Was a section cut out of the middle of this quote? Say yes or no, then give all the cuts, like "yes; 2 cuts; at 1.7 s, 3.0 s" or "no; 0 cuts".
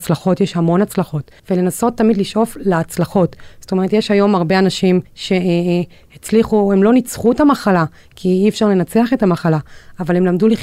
yes; 2 cuts; at 1.4 s, 5.1 s